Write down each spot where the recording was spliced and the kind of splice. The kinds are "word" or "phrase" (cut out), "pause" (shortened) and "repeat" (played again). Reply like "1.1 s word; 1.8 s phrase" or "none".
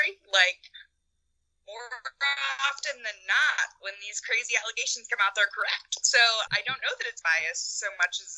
6.5 s word; 7.2 s word